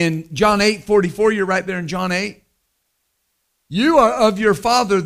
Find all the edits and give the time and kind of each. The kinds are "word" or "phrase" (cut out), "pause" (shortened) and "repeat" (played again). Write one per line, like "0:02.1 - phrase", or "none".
none